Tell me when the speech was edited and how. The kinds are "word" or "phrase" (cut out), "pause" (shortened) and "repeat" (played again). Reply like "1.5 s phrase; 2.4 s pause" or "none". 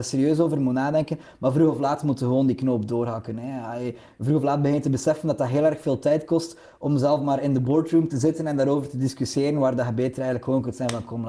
none

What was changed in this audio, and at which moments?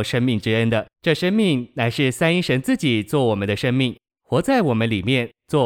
0.9 s pause

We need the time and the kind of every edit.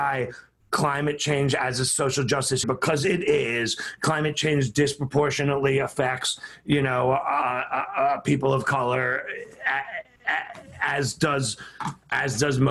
2.6 s phrase

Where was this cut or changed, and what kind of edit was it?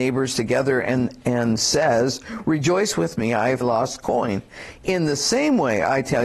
3.6 s phrase

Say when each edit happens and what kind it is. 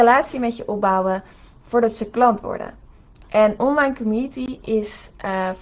3.6 s word

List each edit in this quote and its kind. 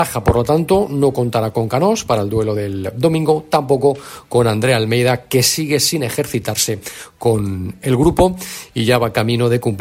none

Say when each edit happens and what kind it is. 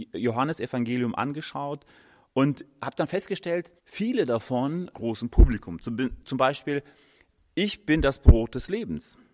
3.8 s pause; 4.9 s phrase; 6.2 s word

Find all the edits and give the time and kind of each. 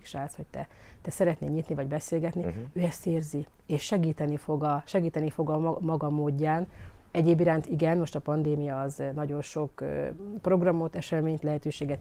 none

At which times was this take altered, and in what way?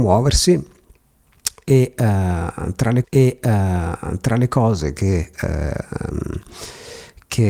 3.0 s repeat

